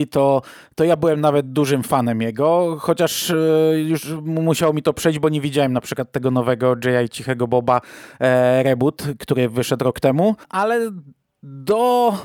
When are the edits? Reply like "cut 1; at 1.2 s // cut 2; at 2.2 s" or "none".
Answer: cut 1; at 10.4 s

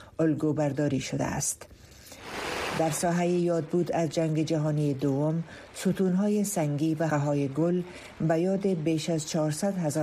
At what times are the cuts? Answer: cut 1; at 7.1 s

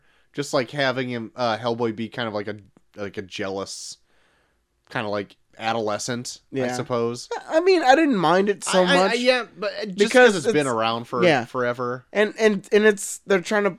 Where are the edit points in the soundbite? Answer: none

